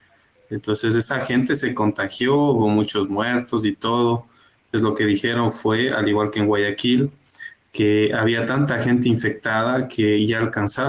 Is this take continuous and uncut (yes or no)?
no